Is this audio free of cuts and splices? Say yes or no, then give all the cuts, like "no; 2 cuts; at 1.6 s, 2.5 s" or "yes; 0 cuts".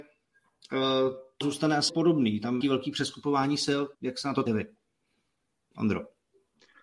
no; 5 cuts; at 1.4 s, 1.9 s, 2.6 s, 3.9 s, 4.5 s